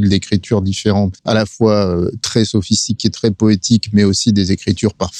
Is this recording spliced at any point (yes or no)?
yes